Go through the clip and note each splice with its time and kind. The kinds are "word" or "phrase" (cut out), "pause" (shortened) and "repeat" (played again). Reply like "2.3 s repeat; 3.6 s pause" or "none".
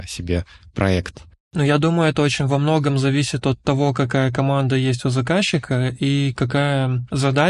none